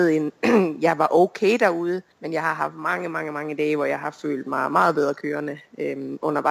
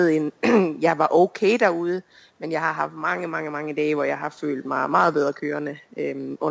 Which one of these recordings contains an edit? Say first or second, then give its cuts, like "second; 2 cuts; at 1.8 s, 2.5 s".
first; 1 cut; at 2.1 s